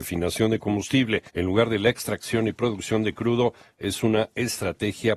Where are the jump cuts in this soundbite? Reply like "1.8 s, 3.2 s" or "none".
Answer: 1.3 s